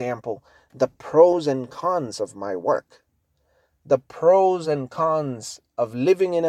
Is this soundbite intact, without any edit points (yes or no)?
yes